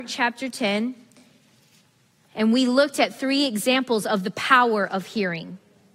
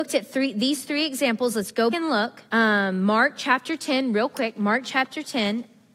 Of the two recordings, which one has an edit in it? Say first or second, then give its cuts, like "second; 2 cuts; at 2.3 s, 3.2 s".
second; 2 cuts; at 1.9 s, 2.5 s